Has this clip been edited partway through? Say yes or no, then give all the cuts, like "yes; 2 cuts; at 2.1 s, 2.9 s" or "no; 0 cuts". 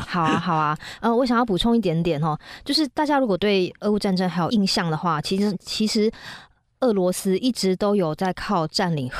no; 0 cuts